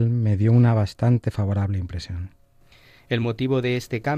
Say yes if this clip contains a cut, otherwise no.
no